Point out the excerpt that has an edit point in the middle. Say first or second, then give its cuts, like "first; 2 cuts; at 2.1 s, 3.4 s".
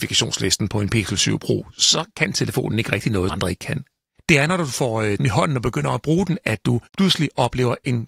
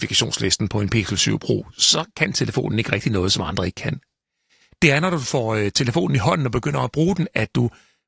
first; 4 cuts; at 3.3 s, 4.2 s, 5.2 s, 6.9 s